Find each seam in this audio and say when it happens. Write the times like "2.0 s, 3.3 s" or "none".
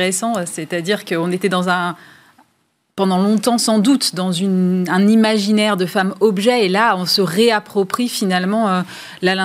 none